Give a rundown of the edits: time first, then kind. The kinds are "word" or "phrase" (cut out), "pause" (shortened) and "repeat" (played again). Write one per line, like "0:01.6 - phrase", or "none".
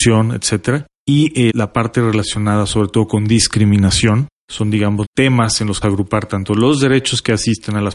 0:01.5 - word
0:05.0 - phrase
0:05.8 - phrase